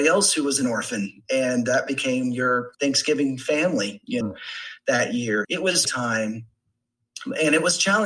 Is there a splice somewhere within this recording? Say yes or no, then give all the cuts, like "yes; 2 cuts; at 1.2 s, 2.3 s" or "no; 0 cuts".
yes; 4 cuts; at 2.7 s, 4.2 s, 5.4 s, 5.8 s